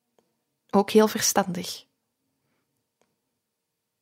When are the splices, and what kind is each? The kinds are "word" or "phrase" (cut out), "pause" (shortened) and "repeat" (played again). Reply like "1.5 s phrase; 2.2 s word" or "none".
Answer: none